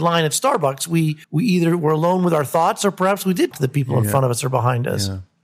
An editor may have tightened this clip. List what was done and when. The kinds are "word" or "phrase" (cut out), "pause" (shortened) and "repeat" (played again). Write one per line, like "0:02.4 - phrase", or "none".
0:01.2 - pause
0:03.5 - word